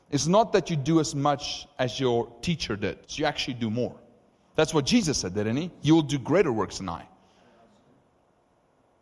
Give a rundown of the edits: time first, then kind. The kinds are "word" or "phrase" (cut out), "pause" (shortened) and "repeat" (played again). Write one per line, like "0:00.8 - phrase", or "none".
0:03.0 - pause